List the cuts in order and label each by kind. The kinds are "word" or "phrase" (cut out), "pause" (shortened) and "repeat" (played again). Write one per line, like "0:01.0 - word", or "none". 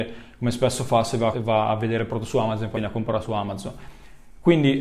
0:01.3 - word
0:02.7 - word